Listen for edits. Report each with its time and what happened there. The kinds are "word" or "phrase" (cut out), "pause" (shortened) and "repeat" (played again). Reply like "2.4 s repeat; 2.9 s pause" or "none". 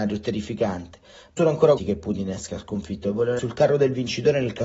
1.4 s word; 1.8 s word; 3.4 s word